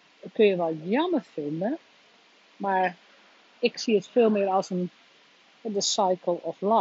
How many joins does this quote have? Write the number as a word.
zero